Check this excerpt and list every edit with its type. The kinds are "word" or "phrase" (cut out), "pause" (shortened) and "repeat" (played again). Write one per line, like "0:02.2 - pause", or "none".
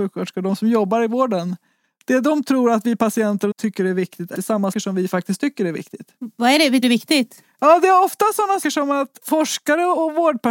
0:03.5 - word
0:04.3 - word
0:04.7 - word
0:06.8 - word
0:08.6 - word